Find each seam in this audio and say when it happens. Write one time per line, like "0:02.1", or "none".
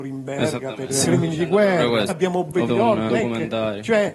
0:01.0
0:02.1
0:02.7
0:03.1